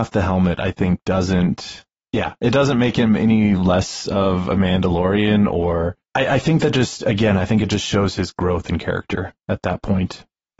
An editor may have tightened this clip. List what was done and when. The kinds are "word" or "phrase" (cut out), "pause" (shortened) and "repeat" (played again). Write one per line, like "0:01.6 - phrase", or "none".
0:06.0 - pause